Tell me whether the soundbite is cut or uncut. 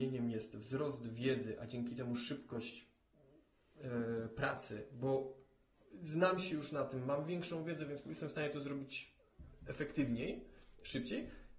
uncut